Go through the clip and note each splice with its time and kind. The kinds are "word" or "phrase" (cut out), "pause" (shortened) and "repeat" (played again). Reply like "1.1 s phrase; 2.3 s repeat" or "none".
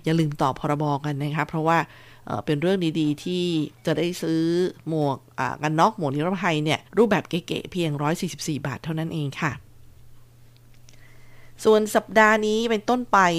3.8 s pause; 6.9 s pause